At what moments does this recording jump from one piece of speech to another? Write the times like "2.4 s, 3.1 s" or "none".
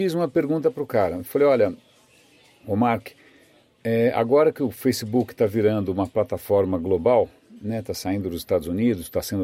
none